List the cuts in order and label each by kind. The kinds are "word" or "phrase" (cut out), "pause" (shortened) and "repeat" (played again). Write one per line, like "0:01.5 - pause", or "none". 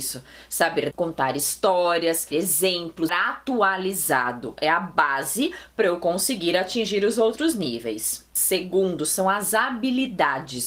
0:00.9 - word
0:02.3 - word
0:03.1 - word